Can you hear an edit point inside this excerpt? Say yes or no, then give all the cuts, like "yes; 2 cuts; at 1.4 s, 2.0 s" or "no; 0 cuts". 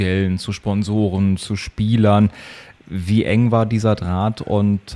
no; 0 cuts